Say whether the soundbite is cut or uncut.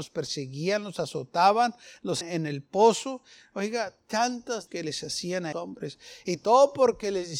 cut